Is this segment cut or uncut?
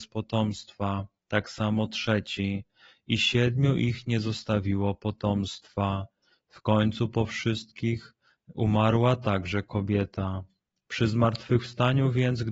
uncut